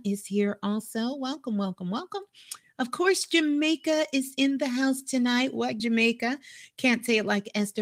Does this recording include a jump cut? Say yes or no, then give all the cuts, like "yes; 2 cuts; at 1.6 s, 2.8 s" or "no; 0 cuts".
yes; 1 cut; at 5.8 s